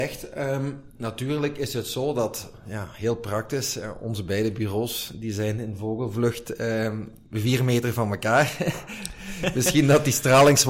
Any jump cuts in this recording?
no; 0 cuts

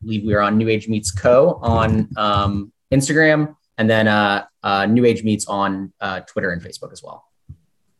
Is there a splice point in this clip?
no; 0 cuts

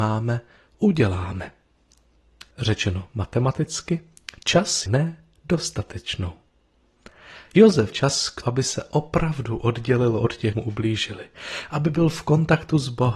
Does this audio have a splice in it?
yes; 5 cuts; at 2.5 s, 4.9 s, 7.9 s, 8.4 s, 10.5 s

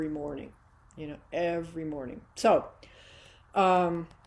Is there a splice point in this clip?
no; 0 cuts

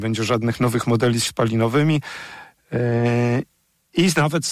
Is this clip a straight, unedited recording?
no; 1 cut; at 1.3 s

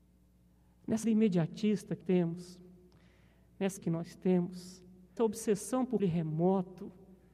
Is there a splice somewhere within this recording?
yes; 5 cuts; at 1.0 s, 2.0 s, 3.8 s, 5.2 s, 6.0 s

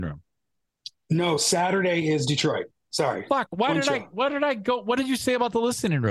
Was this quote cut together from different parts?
no; 0 cuts

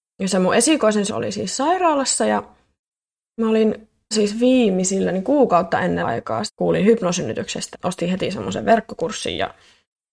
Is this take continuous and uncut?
no; 5 cuts; at 1.1 s, 4.1 s, 6.0 s, 6.5 s, 7.7 s

